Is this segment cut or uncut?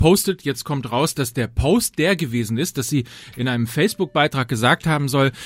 uncut